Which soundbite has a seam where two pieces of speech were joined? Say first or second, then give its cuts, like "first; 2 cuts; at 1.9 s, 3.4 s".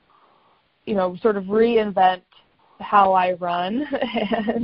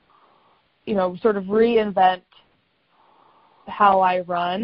first; 1 cut; at 2.6 s